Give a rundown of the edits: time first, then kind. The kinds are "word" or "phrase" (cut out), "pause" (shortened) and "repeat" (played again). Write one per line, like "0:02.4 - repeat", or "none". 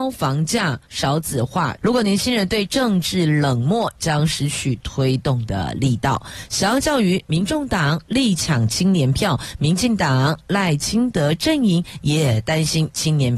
0:01.8 - phrase